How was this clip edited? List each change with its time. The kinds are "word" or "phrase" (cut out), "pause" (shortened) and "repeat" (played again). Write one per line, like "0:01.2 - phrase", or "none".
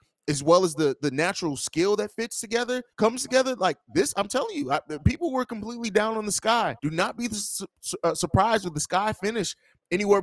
0:02.9 - pause
0:06.8 - pause